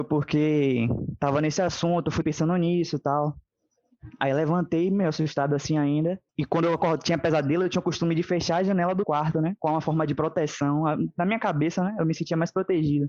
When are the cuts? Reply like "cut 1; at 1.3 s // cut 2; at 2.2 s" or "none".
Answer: cut 1; at 2.2 s // cut 2; at 6.3 s // cut 3; at 9.0 s